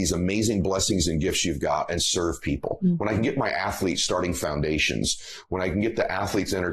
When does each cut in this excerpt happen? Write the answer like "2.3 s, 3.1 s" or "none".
none